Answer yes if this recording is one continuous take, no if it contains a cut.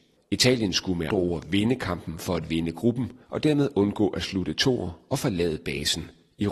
no